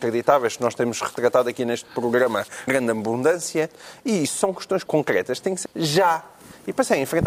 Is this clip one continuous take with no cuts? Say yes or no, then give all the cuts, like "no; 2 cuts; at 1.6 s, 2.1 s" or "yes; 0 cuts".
no; 3 cuts; at 2.7 s, 4.8 s, 5.6 s